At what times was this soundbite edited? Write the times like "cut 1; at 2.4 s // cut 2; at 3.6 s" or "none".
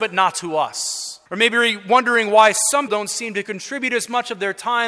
cut 1; at 1.3 s // cut 2; at 2.9 s